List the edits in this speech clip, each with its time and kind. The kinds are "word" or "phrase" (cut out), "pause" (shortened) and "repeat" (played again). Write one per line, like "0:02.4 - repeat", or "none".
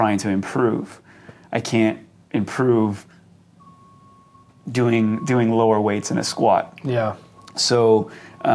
none